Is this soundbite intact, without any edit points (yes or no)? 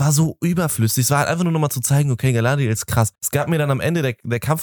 no